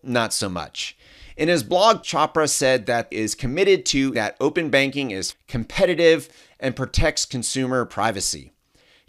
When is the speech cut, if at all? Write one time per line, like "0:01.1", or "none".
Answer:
0:02.0
0:03.1
0:04.1
0:05.3